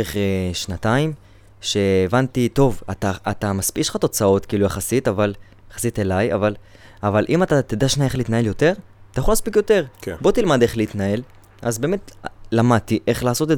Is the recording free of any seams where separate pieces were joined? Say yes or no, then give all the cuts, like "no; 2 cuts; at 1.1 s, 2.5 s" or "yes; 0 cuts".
yes; 0 cuts